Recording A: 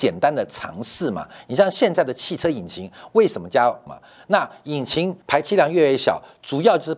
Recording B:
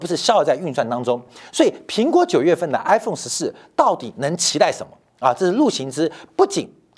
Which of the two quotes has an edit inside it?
A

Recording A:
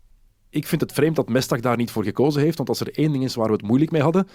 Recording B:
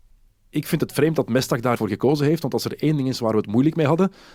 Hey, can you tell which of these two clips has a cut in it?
B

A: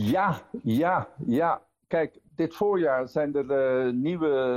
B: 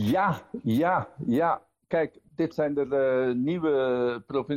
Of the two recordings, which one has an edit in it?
B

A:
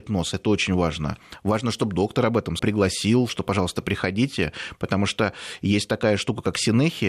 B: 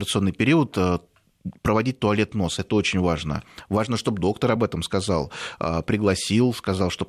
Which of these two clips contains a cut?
A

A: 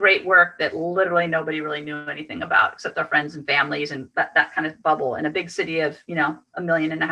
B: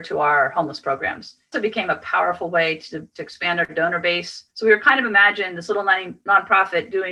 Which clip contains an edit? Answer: B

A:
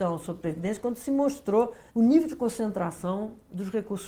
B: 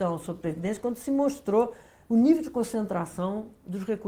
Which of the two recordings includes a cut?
A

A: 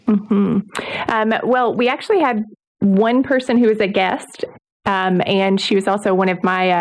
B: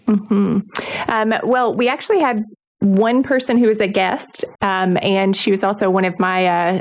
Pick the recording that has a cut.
B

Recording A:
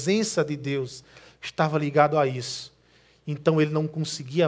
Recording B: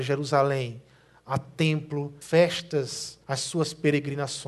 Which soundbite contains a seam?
B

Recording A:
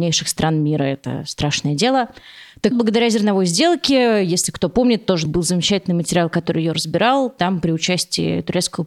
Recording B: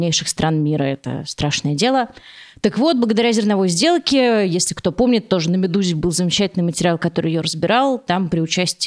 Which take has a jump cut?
A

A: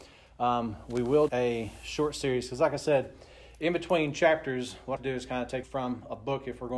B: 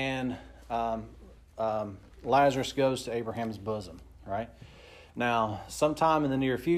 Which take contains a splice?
A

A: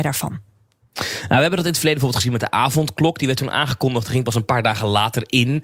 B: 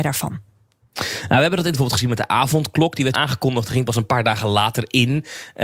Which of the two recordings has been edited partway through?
B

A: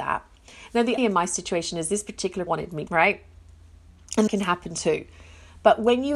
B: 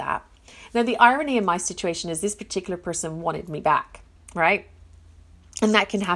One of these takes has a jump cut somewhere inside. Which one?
A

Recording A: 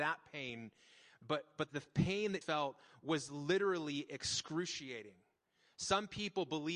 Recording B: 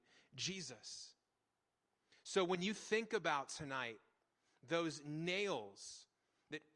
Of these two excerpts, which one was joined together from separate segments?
A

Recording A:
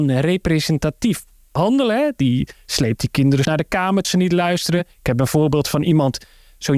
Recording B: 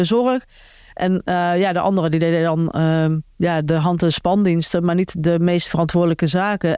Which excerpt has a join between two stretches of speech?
A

